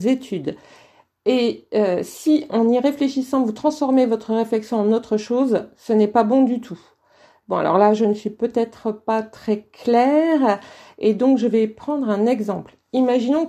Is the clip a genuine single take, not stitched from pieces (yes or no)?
yes